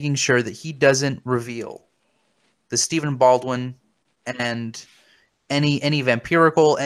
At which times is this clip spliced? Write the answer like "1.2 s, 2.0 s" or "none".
none

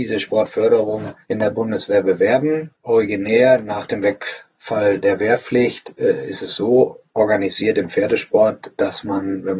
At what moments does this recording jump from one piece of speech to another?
1.2 s, 2.7 s, 7.1 s

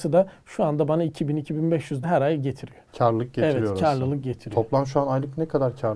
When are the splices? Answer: 2.0 s, 2.9 s

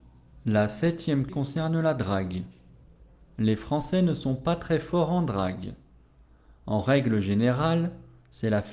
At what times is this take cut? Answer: 1.3 s

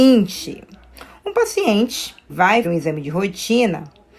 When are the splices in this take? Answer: 2.3 s, 2.6 s

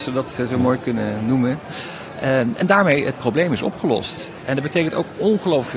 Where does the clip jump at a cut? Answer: none

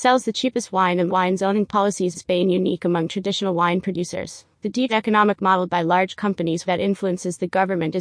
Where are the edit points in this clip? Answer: 1.1 s, 2.1 s, 4.5 s, 4.9 s, 5.7 s, 6.7 s

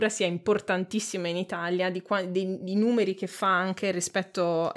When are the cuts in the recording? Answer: none

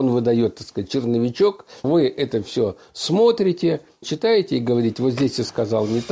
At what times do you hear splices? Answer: 1.8 s, 4.0 s

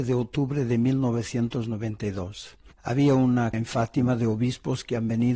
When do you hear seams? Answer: 2.7 s, 3.5 s

